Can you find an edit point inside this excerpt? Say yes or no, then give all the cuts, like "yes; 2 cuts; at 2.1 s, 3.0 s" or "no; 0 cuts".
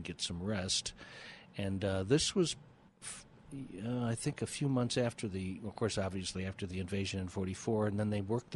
yes; 1 cut; at 2.9 s